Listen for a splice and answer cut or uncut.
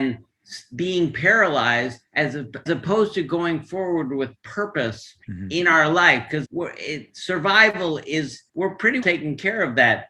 cut